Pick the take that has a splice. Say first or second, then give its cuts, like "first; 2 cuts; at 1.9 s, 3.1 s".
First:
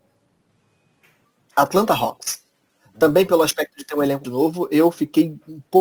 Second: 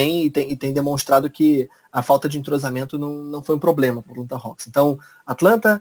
first; 1 cut; at 4.2 s